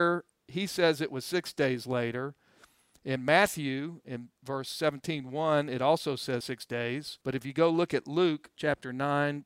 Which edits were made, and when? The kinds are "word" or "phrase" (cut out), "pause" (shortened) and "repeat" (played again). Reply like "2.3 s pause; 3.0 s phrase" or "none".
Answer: 7.2 s pause